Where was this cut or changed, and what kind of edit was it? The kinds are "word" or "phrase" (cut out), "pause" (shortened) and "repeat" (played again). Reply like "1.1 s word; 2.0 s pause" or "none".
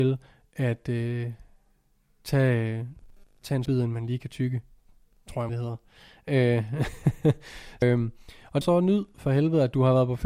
3.6 s word; 5.5 s word; 7.8 s word; 8.6 s word